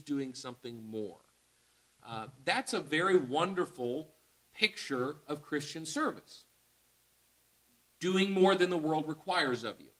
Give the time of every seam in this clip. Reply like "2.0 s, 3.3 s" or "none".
none